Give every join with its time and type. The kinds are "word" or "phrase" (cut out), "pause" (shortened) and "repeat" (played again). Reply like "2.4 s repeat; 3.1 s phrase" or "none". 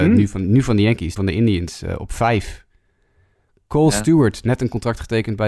1.2 s word